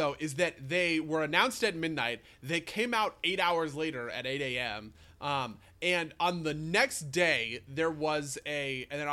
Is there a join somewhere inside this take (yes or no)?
no